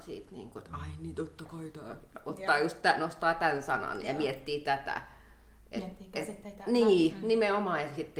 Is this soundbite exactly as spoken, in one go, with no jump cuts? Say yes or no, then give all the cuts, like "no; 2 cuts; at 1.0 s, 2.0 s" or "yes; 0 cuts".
yes; 0 cuts